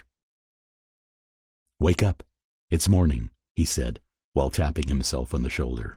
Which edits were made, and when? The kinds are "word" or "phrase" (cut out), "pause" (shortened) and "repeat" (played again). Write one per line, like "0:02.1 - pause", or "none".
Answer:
none